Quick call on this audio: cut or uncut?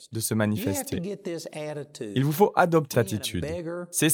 cut